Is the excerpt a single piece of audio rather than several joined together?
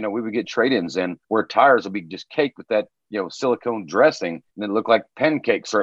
no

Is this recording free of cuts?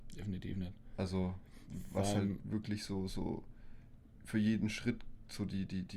yes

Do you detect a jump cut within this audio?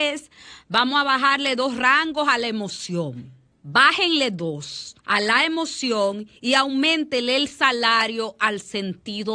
yes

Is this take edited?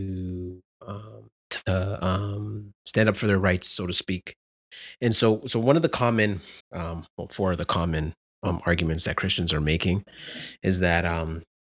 yes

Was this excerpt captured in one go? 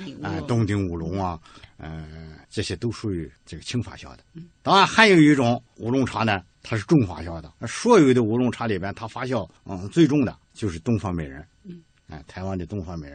no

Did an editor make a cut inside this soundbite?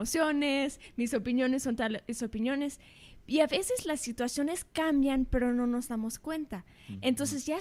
no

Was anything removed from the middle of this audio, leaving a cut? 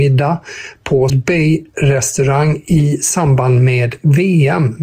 yes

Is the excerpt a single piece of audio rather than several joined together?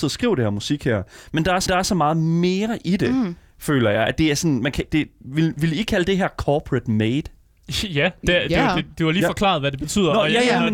no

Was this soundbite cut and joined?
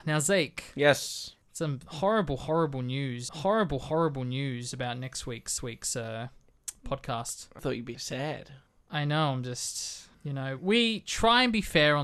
yes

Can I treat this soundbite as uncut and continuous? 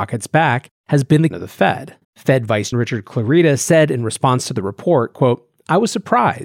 no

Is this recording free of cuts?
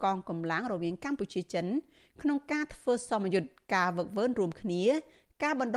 yes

